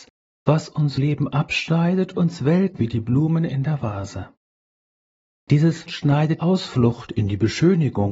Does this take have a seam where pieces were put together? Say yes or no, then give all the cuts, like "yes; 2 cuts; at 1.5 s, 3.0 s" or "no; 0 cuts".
yes; 5 cuts; at 1.0 s, 2.1 s, 2.8 s, 5.9 s, 6.4 s